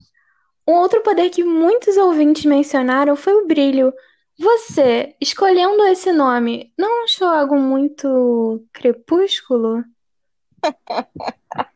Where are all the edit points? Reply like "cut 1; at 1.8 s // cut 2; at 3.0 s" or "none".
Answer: none